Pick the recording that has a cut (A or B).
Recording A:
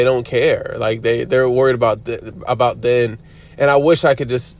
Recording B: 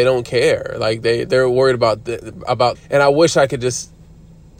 B